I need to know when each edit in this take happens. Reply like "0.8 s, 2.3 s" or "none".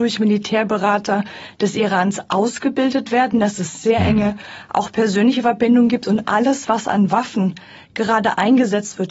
none